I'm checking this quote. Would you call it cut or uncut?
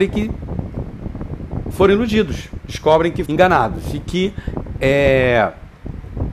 cut